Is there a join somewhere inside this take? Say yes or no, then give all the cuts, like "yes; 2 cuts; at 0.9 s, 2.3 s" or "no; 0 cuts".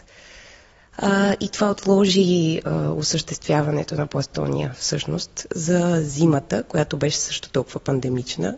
no; 0 cuts